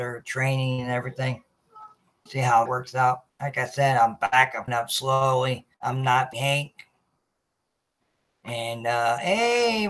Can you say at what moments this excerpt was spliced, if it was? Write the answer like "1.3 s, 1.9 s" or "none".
2.3 s, 2.7 s, 3.3 s, 4.7 s, 5.7 s, 6.3 s

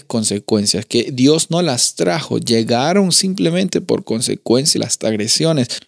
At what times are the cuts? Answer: 4.8 s

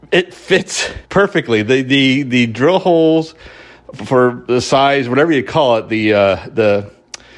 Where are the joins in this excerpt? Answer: 1.1 s

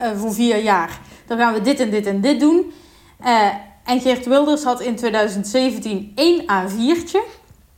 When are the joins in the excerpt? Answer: none

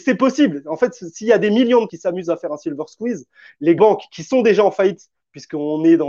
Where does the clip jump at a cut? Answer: 1.9 s, 3.8 s

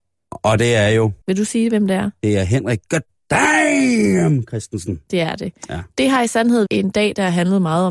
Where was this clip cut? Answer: 1.2 s, 6.7 s

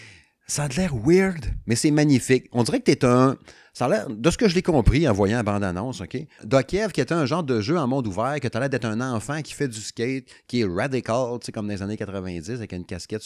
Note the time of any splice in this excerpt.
none

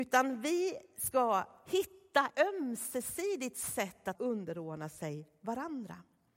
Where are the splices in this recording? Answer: 2.3 s, 4.1 s

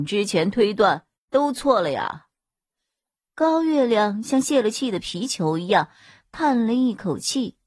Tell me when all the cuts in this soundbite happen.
none

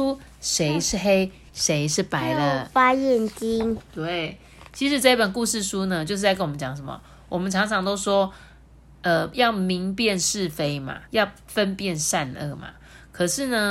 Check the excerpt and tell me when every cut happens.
11.1 s

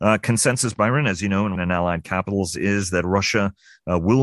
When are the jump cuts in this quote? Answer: 1.6 s

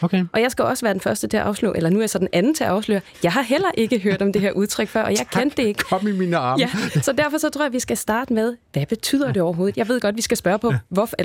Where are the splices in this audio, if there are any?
none

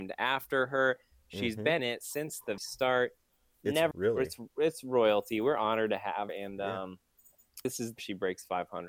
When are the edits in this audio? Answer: 1.8 s, 2.6 s, 3.9 s, 6.3 s, 7.6 s, 8.0 s

